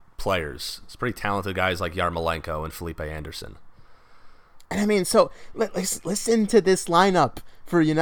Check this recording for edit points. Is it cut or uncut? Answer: uncut